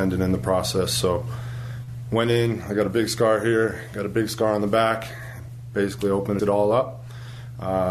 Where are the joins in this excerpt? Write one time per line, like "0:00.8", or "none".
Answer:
0:06.4